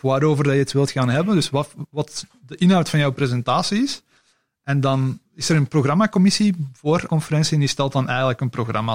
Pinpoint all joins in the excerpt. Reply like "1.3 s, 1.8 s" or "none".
5.3 s, 7.1 s